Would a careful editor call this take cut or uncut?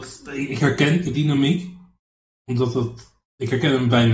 cut